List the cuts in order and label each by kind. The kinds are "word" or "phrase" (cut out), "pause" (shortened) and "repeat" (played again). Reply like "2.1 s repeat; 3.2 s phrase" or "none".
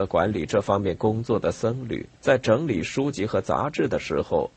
2.1 s pause

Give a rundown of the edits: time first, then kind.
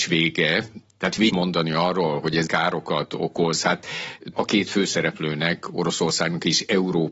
1.3 s word; 2.5 s word; 4.3 s word

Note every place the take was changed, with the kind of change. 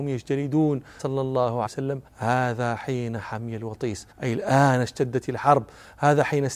1.0 s word; 1.7 s word; 2.1 s pause; 4.1 s pause

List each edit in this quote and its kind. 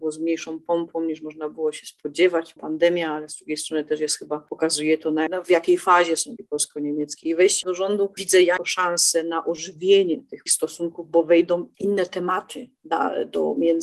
2.6 s word; 5.3 s word; 6.4 s word; 7.6 s word; 8.6 s word; 10.5 s word

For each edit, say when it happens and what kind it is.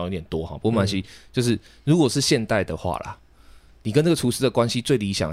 none

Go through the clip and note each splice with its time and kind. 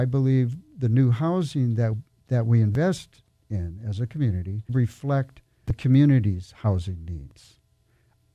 1.9 s word; 4.7 s word; 5.7 s word

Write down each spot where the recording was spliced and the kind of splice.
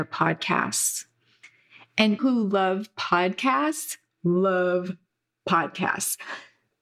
2.2 s word

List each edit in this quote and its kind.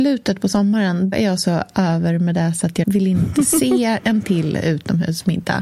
1.1 s word; 2.8 s word

